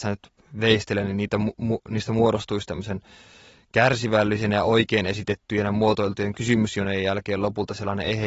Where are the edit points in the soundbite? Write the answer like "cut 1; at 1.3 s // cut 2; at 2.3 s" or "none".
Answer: none